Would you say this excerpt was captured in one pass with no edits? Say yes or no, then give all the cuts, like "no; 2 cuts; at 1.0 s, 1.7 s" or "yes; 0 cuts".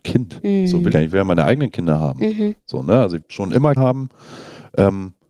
no; 3 cuts; at 0.9 s, 3.2 s, 3.8 s